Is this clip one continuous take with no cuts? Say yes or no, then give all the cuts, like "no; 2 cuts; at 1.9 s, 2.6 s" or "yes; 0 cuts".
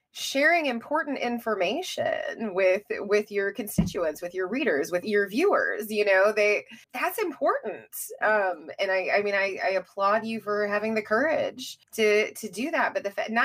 no; 3 cuts; at 5.0 s, 6.8 s, 11.8 s